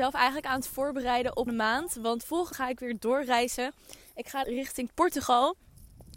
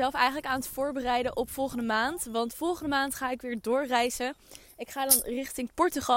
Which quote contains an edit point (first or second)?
first